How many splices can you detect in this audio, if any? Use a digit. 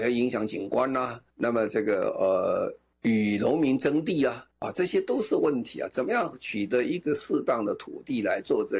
3